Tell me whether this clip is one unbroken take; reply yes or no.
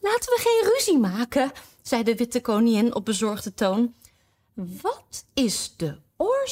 yes